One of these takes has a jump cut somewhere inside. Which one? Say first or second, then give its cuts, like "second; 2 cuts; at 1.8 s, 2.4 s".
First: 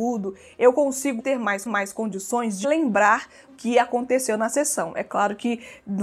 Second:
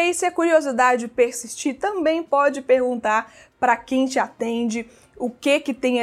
first; 4 cuts; at 1.2 s, 1.7 s, 2.6 s, 3.5 s